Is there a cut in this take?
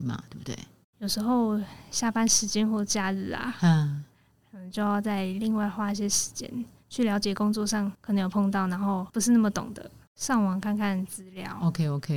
yes; 2 cuts; at 7.9 s, 9.1 s

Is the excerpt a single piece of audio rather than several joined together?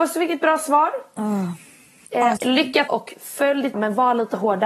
no; 3 cuts; at 2.4 s, 2.9 s, 3.7 s

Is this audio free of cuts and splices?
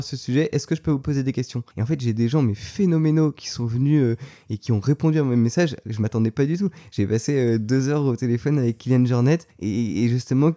no; 2 cuts; at 1.7 s, 9.5 s

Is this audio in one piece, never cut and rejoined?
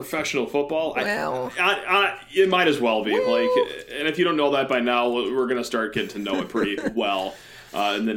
yes; 0 cuts

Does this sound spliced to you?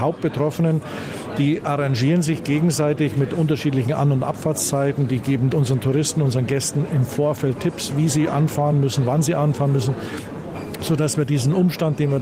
no; 0 cuts

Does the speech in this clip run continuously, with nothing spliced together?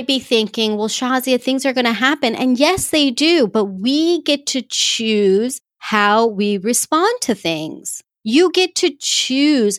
yes; 0 cuts

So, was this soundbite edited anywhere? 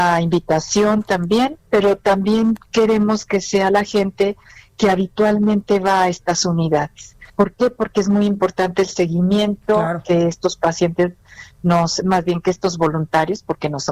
yes; 2 cuts; at 7.3 s, 12.0 s

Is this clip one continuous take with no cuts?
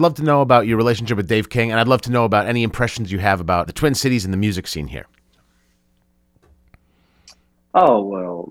no; 1 cut; at 3.7 s

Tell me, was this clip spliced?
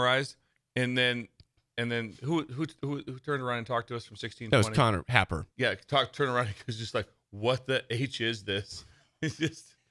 yes; 1 cut; at 5.5 s

